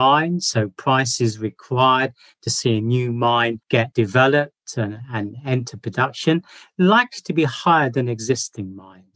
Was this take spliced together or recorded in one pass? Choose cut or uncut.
uncut